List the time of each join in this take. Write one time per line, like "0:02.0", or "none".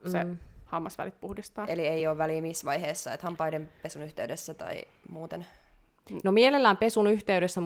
none